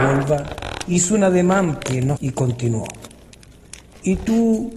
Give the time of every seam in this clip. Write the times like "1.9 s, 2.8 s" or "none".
1.8 s, 2.2 s